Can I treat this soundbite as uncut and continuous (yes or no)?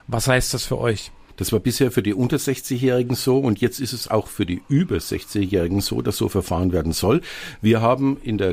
yes